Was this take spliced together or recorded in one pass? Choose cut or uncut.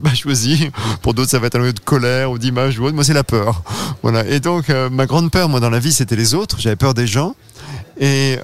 uncut